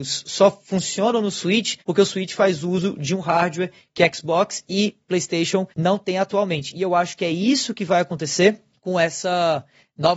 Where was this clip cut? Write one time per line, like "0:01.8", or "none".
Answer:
0:01.8
0:05.7

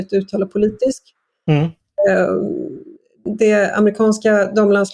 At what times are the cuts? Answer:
0:03.0

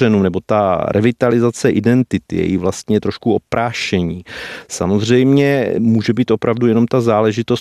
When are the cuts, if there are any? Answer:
none

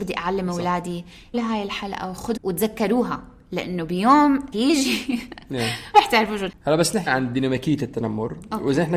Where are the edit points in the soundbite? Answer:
0:01.3
0:02.4
0:04.5
0:05.9
0:06.5
0:07.1

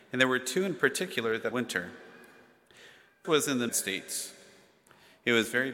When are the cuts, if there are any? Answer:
0:01.5
0:03.2
0:03.7

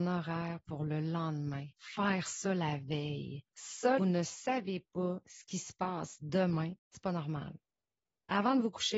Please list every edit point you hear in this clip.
0:04.0
0:06.8

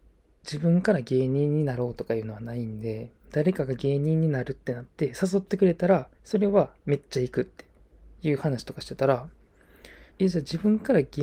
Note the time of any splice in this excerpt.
0:03.2
0:06.1
0:06.8
0:08.2
0:10.1

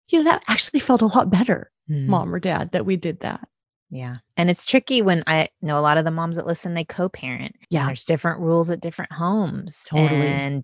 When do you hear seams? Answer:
0:01.8
0:04.3
0:07.6

